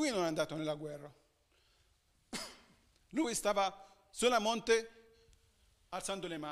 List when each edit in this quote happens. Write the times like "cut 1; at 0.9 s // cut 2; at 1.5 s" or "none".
none